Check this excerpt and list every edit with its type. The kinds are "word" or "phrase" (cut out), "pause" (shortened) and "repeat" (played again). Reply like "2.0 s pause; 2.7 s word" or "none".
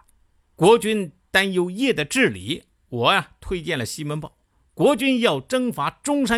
none